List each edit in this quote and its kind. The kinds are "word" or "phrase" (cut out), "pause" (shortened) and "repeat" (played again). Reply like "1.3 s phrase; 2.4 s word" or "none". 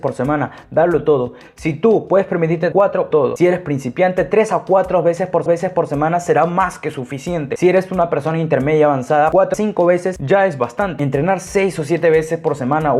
2.7 s word; 3.1 s word; 5.5 s repeat; 9.5 s phrase

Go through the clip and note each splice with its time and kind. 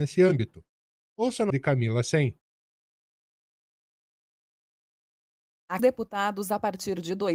1.5 s word; 5.8 s phrase

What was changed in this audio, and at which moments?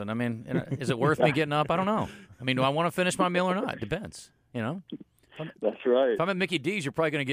none

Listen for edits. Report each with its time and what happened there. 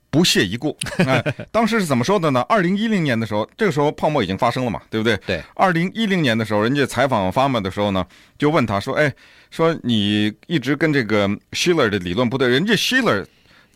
none

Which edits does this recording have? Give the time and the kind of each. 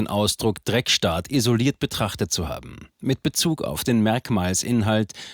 none

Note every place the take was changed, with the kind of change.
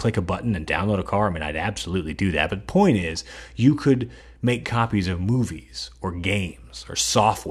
none

